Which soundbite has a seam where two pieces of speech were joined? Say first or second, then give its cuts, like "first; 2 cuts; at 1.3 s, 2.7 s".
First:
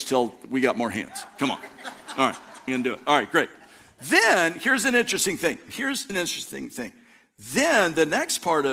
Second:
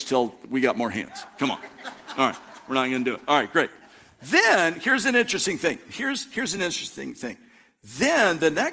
first; 2 cuts; at 2.7 s, 6.1 s